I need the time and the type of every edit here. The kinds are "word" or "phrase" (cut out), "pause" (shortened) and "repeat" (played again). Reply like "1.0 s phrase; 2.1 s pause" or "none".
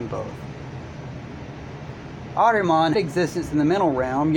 2.9 s word